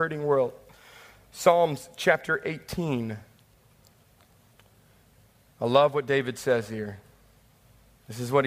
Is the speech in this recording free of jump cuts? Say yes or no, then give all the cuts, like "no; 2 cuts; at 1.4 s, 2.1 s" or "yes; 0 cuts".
yes; 0 cuts